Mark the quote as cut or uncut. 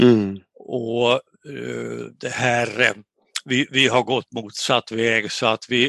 uncut